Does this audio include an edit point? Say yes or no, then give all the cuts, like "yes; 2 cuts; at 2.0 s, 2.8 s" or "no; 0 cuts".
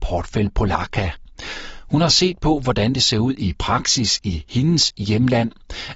no; 0 cuts